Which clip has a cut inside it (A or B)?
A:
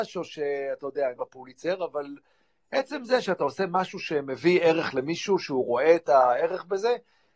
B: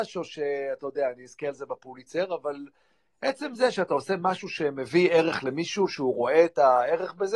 A